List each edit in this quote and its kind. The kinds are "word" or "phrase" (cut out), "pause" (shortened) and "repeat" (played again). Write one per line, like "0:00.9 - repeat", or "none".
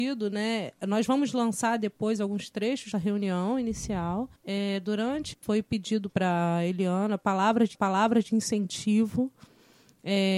0:02.9 - word
0:04.4 - pause
0:05.3 - phrase
0:06.1 - phrase
0:07.7 - repeat